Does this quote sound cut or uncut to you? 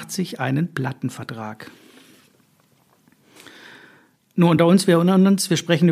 uncut